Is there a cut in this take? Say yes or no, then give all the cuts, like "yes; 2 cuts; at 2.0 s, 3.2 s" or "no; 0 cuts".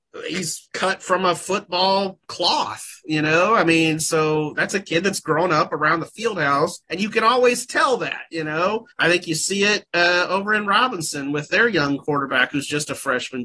yes; 2 cuts; at 6.8 s, 8.9 s